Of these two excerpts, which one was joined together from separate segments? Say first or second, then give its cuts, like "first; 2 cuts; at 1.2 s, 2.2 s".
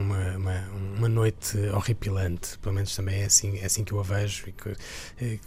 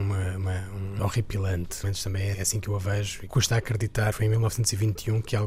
second; 5 cuts; at 1.0 s, 1.8 s, 2.3 s, 3.3 s, 4.1 s